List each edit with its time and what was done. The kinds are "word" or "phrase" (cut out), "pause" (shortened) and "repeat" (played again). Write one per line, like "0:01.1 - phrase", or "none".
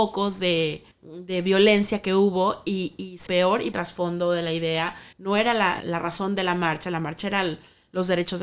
0:00.9 - pause
0:03.3 - phrase
0:03.7 - phrase
0:05.1 - pause
0:05.8 - word